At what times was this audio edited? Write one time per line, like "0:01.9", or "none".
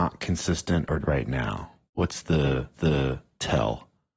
0:01.0
0:01.9
0:02.7